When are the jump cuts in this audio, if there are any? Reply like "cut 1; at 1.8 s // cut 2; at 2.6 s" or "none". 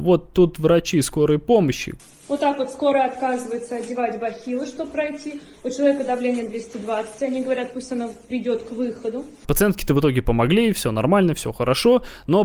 none